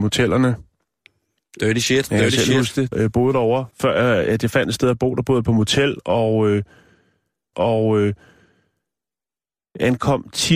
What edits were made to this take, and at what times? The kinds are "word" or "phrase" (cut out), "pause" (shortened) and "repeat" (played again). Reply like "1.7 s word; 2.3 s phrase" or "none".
2.9 s word; 3.7 s pause; 7.5 s repeat